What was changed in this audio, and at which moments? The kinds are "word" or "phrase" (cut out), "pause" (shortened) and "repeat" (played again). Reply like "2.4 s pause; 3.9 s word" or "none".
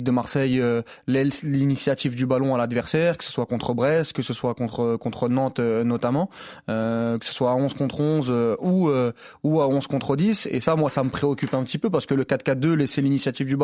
none